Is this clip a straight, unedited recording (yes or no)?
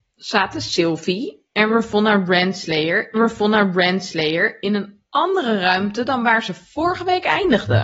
no